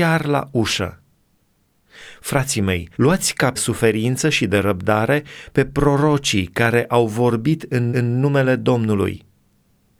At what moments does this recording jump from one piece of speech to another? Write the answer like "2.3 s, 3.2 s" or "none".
2.9 s, 3.6 s, 7.9 s